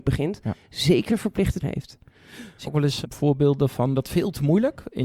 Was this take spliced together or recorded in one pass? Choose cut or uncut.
cut